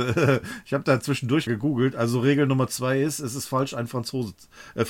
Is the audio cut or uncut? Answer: cut